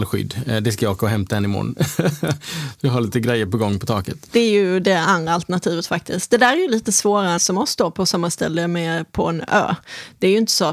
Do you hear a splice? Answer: yes; 1 cut; at 7.4 s

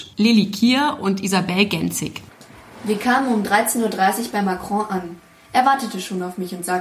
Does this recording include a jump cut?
no; 0 cuts

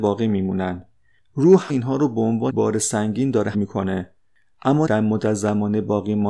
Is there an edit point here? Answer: yes; 4 cuts; at 1.7 s, 2.5 s, 3.5 s, 4.9 s

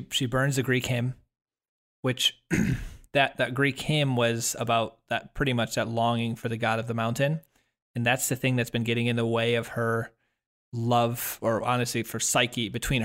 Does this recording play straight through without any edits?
yes; 0 cuts

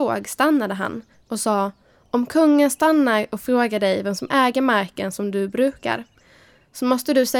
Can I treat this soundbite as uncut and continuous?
yes; 0 cuts

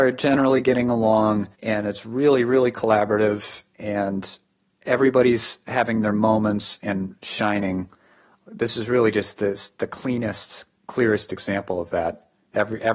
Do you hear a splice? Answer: yes; 2 cuts; at 1.5 s, 3.7 s

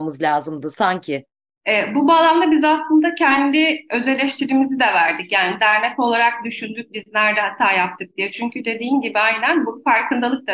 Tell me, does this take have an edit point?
no; 0 cuts

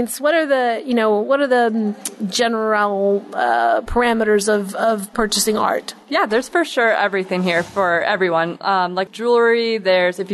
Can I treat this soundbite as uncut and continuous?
no; 1 cut; at 9.1 s

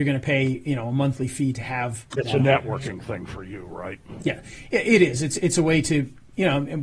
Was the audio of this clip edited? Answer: no; 0 cuts

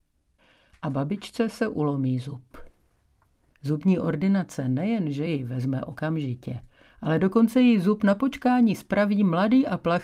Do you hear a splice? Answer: no; 0 cuts

